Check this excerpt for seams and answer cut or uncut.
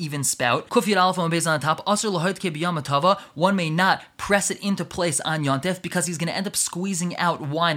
uncut